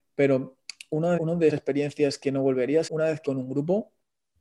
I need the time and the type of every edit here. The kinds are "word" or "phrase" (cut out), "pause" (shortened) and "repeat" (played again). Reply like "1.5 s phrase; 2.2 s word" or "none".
1.2 s word; 1.5 s word; 2.9 s word; 3.3 s word